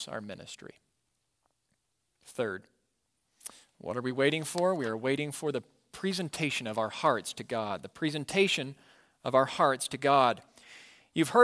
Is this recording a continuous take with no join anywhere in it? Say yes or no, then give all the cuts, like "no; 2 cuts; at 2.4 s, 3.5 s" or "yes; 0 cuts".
yes; 0 cuts